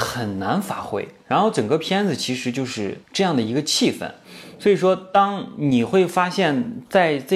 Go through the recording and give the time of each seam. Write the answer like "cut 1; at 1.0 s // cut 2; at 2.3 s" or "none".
cut 1; at 3.0 s